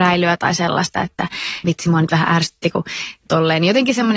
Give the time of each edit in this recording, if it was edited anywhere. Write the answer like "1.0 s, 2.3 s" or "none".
1.6 s, 3.3 s